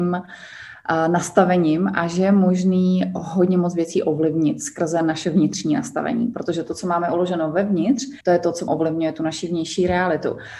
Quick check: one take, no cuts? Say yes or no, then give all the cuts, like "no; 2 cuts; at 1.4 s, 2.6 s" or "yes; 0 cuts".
no; 2 cuts; at 8.2 s, 8.7 s